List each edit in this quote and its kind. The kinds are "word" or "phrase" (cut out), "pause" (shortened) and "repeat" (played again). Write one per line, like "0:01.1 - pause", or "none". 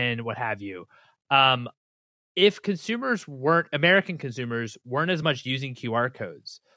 none

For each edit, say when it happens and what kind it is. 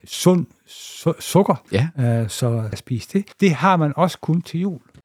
0:01.7 - pause
0:02.7 - phrase
0:03.3 - pause

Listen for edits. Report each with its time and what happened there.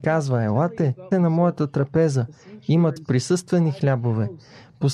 0:01.1 - word
0:03.0 - word

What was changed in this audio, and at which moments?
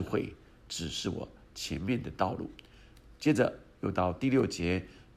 none

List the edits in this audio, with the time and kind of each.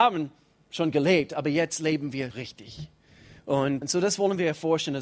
0:02.3 - word
0:03.8 - word

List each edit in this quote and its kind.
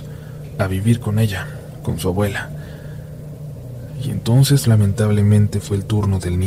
none

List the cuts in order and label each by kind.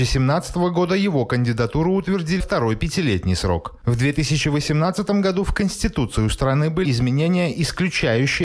0:02.4 - word
0:06.8 - word

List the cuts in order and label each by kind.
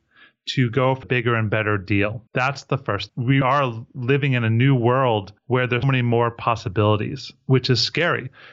0:01.0 - word
0:02.3 - pause
0:03.1 - phrase
0:03.4 - word
0:05.4 - pause
0:05.8 - word

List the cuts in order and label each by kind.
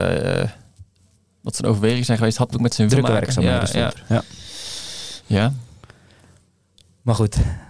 0:02.5 - word
0:02.9 - word

